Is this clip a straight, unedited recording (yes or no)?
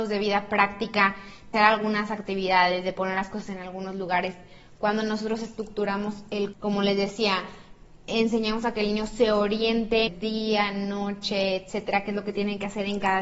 no